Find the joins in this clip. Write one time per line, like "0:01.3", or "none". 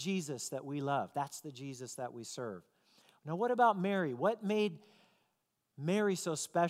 none